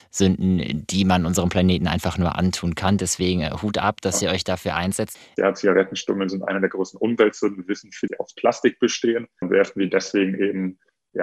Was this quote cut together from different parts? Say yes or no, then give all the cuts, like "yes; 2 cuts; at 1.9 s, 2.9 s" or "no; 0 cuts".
yes; 1 cut; at 8.1 s